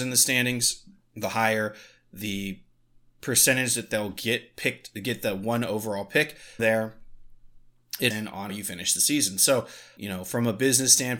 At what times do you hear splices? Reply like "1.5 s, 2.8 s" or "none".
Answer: 6.6 s, 8.1 s, 8.5 s, 10.0 s